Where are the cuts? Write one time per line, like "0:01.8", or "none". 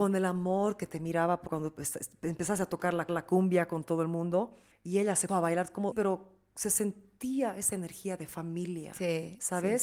0:01.5
0:03.1
0:04.7
0:05.3
0:05.9